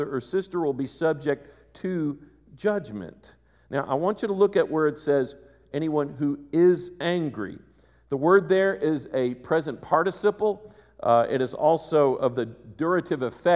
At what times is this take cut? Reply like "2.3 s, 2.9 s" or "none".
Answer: none